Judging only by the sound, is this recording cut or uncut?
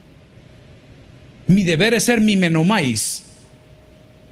uncut